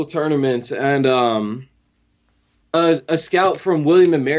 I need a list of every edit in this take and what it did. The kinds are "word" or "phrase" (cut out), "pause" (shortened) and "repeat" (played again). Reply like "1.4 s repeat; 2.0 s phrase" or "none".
none